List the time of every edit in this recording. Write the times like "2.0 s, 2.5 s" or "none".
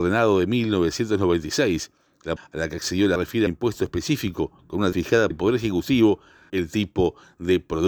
2.4 s, 3.2 s, 3.5 s, 4.9 s, 5.3 s, 6.5 s

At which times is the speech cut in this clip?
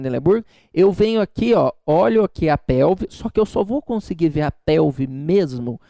none

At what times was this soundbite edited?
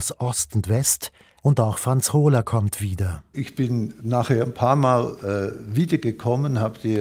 none

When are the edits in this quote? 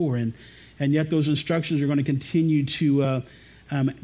none

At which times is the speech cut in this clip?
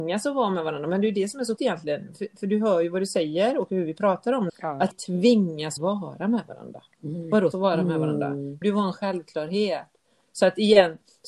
1.6 s, 4.5 s, 4.9 s, 5.8 s, 7.5 s, 8.6 s

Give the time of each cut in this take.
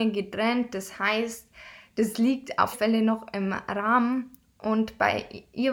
2.7 s

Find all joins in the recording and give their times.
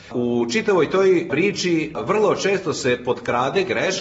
none

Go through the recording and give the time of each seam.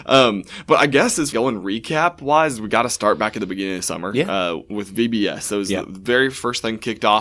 1.3 s

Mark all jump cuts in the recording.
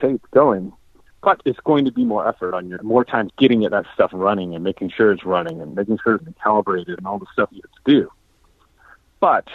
1.4 s, 2.8 s, 3.3 s, 6.2 s

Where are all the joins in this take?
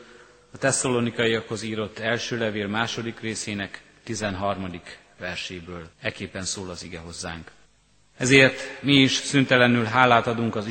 5.9 s, 7.7 s

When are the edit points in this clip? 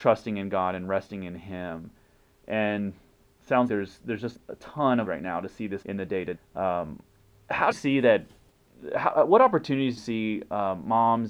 3.7 s, 4.3 s, 5.1 s, 5.8 s, 6.3 s, 7.7 s, 10.0 s

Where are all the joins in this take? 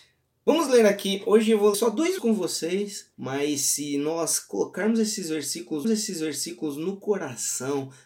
1.7 s, 2.2 s, 3.1 s, 5.8 s

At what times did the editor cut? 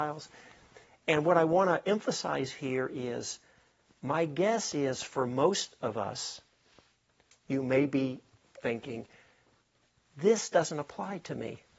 none

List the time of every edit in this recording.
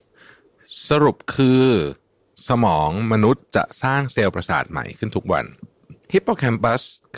6.0 s

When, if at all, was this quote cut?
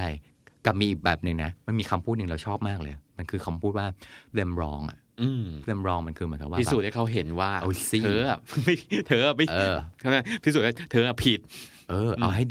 4.3 s, 5.6 s

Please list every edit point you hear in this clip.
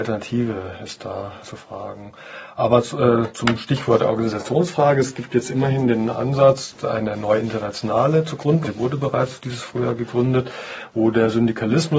1.4 s, 8.6 s

